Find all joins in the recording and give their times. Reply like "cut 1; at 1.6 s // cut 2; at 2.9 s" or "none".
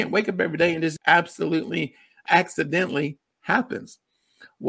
cut 1; at 1.0 s // cut 2; at 2.3 s

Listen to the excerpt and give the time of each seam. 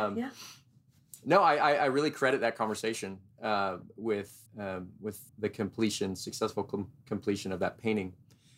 cut 1; at 4.5 s // cut 2; at 5.3 s

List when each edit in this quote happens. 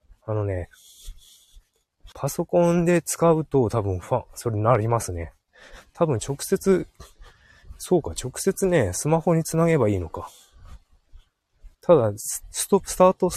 cut 1; at 2.1 s // cut 2; at 11.7 s

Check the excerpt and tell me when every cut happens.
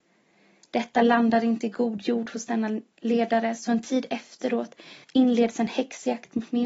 cut 1; at 2.9 s // cut 2; at 5.0 s

